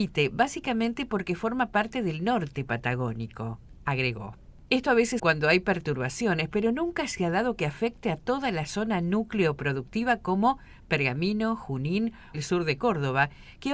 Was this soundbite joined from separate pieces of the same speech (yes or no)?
yes